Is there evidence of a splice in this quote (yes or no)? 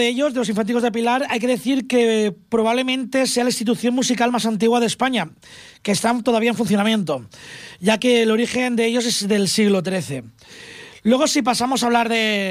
no